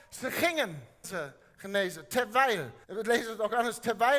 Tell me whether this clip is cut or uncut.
cut